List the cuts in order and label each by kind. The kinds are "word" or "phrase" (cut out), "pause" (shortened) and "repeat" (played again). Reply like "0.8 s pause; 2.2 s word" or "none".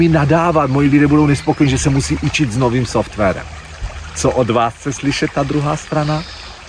none